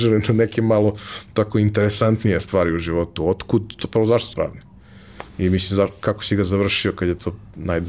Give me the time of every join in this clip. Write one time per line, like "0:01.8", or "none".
0:04.3
0:05.3